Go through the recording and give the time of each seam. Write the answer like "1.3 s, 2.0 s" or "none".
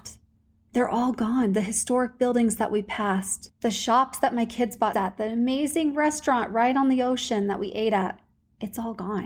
4.9 s